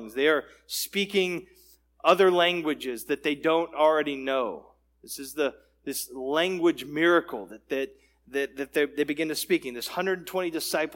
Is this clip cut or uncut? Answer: uncut